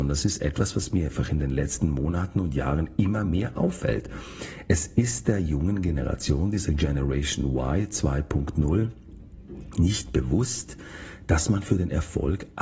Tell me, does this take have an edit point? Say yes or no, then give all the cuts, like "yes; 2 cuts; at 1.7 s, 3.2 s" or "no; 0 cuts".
no; 0 cuts